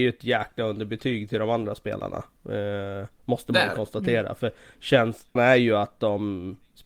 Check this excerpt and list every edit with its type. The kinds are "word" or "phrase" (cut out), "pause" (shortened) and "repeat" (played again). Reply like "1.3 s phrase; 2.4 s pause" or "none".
5.4 s word